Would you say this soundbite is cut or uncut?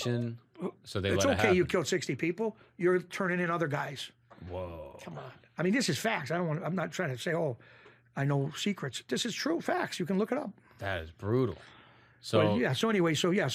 uncut